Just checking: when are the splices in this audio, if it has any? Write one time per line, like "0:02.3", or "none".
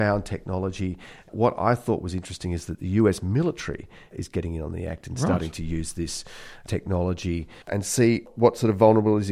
0:07.6